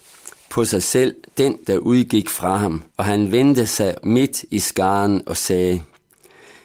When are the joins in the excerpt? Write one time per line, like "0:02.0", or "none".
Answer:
0:01.6
0:02.9
0:04.0

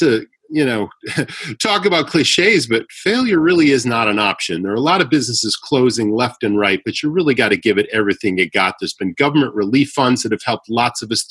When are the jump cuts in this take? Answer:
none

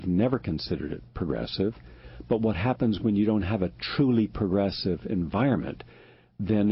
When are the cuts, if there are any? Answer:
none

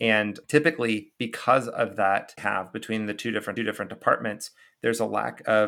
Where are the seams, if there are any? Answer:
0:02.4
0:03.6

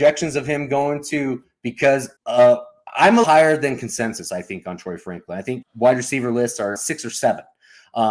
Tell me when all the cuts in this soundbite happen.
0:02.2
0:03.2
0:05.6
0:06.8

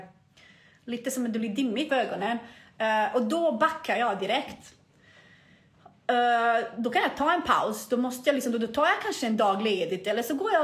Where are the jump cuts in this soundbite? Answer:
0:01.9

